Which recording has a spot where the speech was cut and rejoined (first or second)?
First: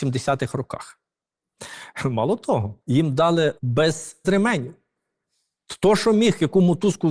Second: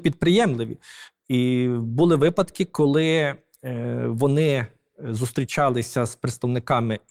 first